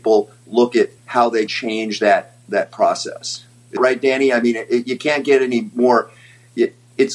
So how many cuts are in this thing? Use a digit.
3